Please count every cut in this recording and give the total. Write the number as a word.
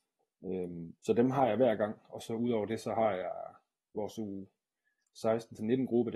one